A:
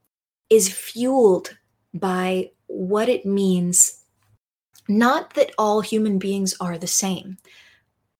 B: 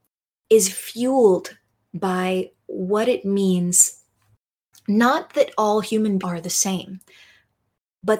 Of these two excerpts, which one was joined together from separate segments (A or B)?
B